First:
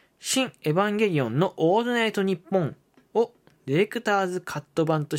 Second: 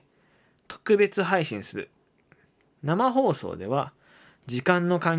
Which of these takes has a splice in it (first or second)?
first